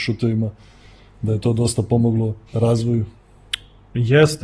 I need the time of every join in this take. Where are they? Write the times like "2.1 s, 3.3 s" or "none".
2.5 s